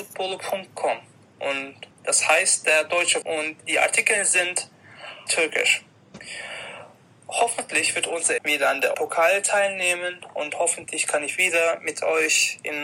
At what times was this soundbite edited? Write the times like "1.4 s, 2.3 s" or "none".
1.9 s, 3.2 s, 3.6 s, 5.3 s, 8.4 s, 8.9 s